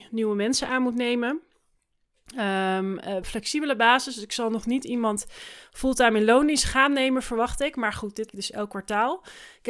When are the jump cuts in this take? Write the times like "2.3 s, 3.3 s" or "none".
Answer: 3.2 s, 8.3 s